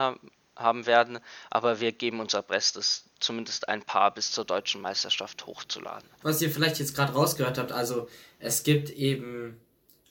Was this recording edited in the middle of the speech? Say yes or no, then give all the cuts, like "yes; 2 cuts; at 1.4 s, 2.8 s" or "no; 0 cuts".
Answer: no; 0 cuts